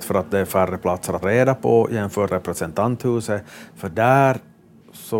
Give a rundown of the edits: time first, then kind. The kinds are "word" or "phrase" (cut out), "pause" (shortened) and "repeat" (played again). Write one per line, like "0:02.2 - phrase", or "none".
0:01.2 - word
0:02.3 - word